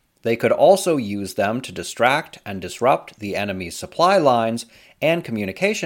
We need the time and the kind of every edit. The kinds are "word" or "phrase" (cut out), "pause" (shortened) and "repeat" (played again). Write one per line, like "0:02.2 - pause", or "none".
none